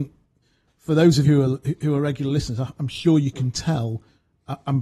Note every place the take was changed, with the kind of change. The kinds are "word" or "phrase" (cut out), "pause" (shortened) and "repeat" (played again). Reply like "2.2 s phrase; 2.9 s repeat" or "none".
1.2 s word